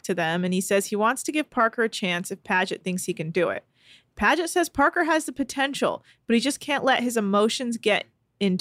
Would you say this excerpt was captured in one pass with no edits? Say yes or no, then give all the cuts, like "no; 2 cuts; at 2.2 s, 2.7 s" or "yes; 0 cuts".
yes; 0 cuts